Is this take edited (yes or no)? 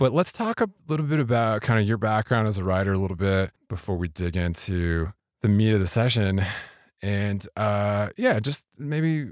no